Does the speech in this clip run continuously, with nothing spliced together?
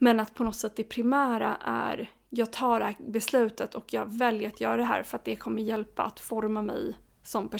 yes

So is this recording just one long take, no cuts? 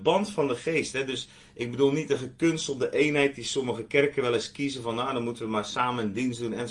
yes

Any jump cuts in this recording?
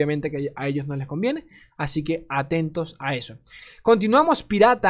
no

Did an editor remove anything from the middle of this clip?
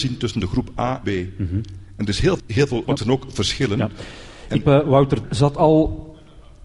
yes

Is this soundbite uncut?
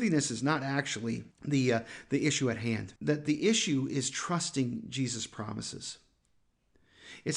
no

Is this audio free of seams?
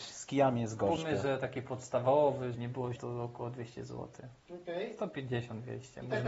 no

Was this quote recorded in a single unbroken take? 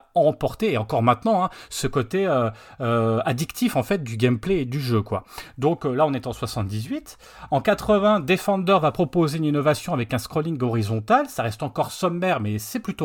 yes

